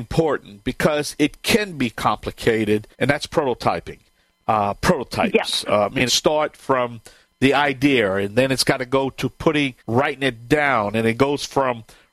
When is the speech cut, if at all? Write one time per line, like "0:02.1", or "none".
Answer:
0:02.9
0:06.1
0:09.8